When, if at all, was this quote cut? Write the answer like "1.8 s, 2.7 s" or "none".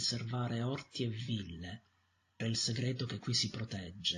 2.4 s